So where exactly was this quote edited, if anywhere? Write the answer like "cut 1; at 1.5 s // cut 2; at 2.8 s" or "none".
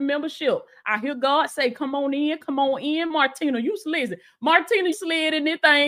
cut 1; at 4.9 s